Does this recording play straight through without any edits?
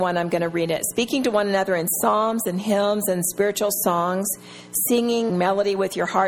no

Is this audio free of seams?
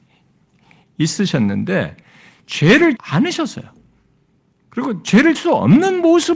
no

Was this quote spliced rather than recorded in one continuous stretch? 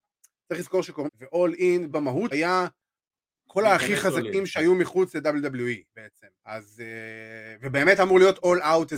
yes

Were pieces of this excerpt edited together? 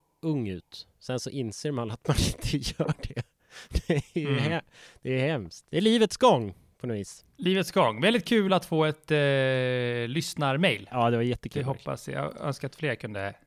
no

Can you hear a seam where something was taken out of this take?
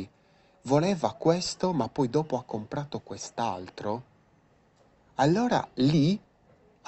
no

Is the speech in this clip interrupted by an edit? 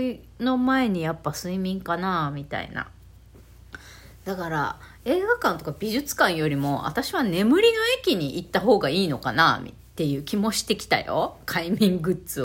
yes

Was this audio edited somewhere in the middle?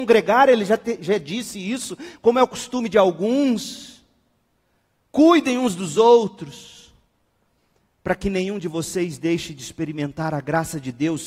no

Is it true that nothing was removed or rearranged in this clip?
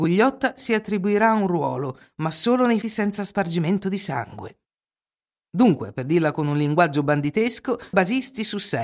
no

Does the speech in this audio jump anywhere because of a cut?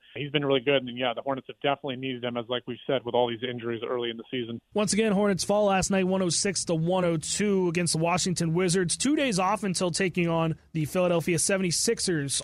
no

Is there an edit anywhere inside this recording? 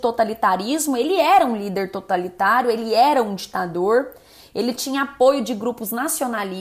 no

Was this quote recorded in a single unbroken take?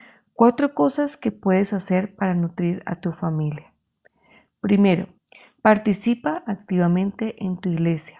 no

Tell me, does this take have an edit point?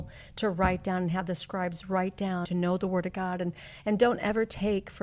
yes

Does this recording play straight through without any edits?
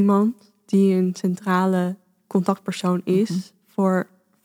yes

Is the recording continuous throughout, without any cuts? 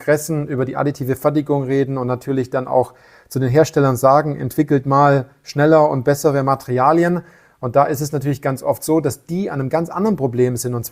yes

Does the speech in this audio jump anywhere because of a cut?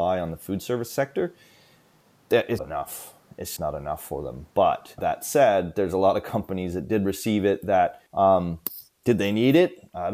yes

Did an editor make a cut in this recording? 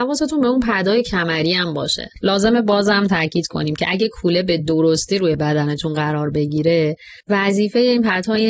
no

